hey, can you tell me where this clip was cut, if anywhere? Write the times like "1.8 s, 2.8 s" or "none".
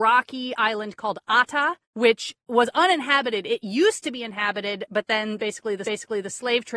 1.8 s, 5.8 s